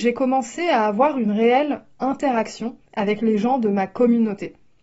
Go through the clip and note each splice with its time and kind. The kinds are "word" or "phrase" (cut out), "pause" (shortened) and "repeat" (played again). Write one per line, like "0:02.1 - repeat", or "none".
0:02.9 - pause